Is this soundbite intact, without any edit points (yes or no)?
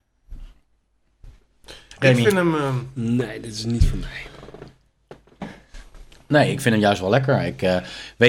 yes